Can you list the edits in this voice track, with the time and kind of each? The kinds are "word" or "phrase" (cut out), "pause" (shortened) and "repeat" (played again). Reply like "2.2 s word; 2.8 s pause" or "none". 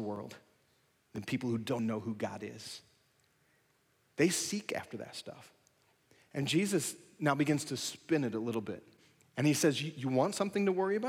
1.8 s word